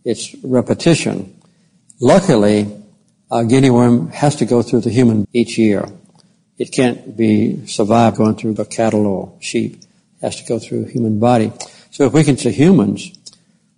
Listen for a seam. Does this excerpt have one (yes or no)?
yes